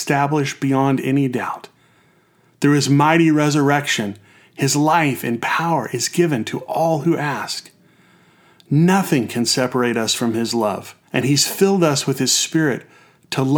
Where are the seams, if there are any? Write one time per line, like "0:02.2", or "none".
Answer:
0:11.1